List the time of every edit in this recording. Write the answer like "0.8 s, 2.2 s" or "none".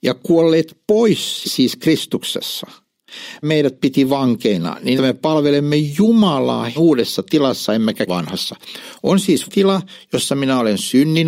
1.4 s, 3.4 s, 5.0 s, 6.8 s, 8.1 s, 9.5 s